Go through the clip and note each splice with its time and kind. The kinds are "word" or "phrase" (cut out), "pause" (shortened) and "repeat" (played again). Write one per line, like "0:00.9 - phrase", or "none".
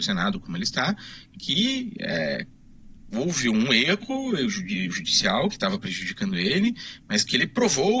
none